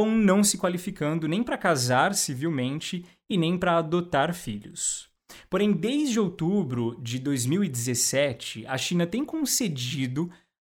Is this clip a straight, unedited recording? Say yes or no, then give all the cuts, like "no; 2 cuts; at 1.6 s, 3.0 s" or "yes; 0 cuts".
yes; 0 cuts